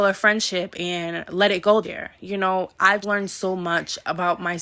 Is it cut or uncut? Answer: cut